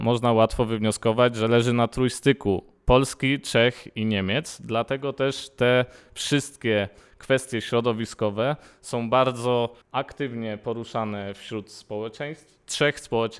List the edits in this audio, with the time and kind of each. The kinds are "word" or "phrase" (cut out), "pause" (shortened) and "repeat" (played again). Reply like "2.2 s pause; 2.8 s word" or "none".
9.8 s pause